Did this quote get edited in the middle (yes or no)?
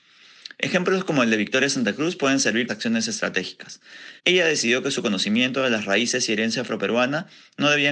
yes